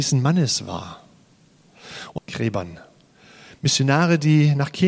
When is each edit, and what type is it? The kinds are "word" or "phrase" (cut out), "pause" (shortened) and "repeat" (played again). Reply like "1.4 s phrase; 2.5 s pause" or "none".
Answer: 2.2 s phrase